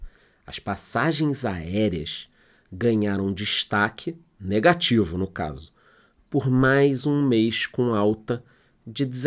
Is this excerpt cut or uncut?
uncut